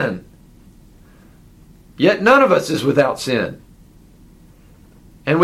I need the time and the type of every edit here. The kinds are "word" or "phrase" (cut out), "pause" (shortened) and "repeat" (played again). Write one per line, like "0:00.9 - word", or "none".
none